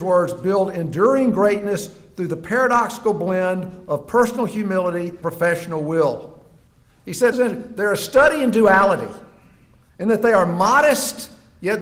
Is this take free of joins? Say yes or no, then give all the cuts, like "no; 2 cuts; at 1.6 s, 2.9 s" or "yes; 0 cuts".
no; 2 cuts; at 5.2 s, 7.3 s